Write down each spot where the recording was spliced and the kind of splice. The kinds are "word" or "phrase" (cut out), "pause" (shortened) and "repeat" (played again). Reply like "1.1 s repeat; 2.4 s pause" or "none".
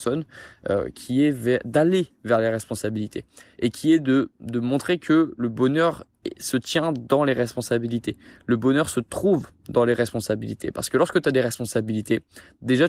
none